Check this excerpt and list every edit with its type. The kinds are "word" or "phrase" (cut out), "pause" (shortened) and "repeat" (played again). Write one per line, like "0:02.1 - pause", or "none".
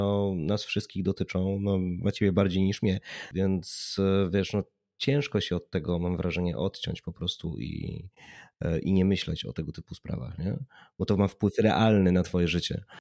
none